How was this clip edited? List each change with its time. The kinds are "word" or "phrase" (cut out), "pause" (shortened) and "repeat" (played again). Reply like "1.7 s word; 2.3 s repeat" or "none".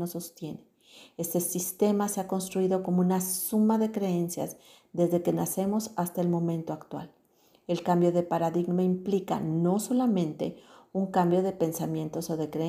none